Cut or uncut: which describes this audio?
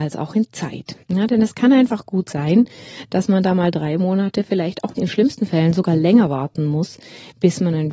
cut